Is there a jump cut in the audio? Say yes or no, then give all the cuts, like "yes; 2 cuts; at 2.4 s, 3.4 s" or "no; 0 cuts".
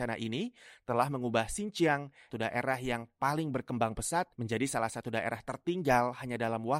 yes; 2 cuts; at 2.3 s, 4.3 s